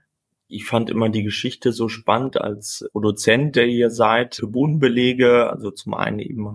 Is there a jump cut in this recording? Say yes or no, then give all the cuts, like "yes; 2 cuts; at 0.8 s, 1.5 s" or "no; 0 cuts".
no; 0 cuts